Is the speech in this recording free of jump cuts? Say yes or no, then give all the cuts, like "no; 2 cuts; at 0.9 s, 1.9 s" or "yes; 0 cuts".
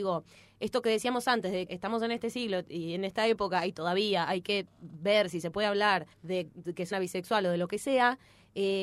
no; 4 cuts; at 1.7 s, 4.7 s, 6.1 s, 6.9 s